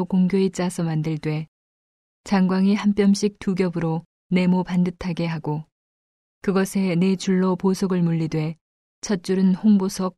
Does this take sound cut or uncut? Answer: uncut